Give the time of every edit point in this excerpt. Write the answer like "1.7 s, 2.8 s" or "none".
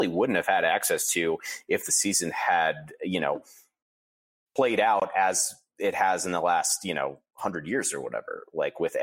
none

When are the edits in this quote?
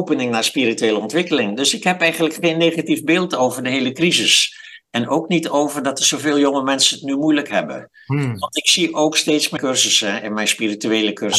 9.6 s

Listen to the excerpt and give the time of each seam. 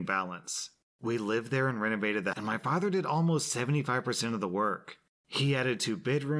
2.3 s

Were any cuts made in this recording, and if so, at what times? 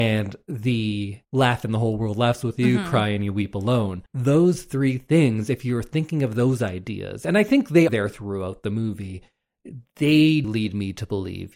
1.2 s, 4.1 s, 7.9 s, 10.4 s

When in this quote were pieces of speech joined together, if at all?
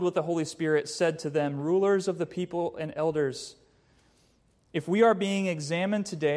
none

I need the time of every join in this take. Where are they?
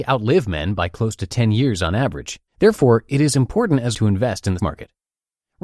2.5 s, 3.9 s, 4.6 s

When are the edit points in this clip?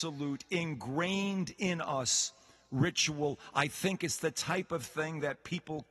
none

